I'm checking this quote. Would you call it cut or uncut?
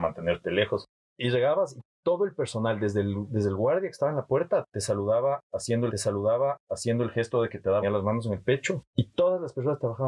cut